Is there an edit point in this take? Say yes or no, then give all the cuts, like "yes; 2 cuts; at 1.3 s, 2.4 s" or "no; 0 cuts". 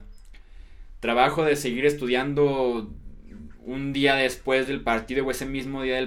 no; 0 cuts